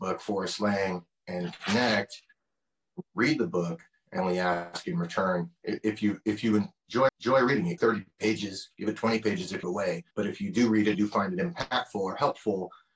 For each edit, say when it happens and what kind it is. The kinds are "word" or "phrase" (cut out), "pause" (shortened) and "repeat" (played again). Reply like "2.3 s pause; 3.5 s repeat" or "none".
3.1 s pause; 4.2 s phrase; 5.6 s pause; 7.1 s repeat; 7.8 s phrase; 9.6 s phrase; 10.1 s pause; 10.9 s phrase